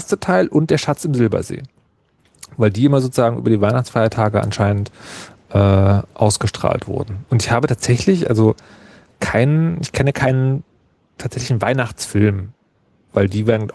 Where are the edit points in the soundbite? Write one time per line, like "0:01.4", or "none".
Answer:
none